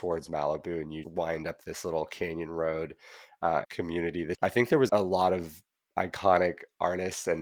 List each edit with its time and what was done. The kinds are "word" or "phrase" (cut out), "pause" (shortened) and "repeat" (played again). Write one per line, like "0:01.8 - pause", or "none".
0:01.0 - word
0:03.6 - phrase
0:04.3 - phrase
0:04.9 - word